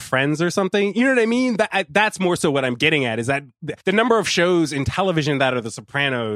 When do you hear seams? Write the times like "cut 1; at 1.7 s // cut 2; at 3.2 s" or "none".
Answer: cut 1; at 3.8 s